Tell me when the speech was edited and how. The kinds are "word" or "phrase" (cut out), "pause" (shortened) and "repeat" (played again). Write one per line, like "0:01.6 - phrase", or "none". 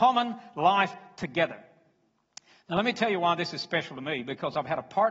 none